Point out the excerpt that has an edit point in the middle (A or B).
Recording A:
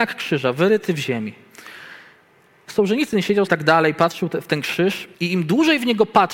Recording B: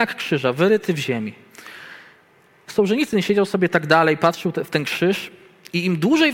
A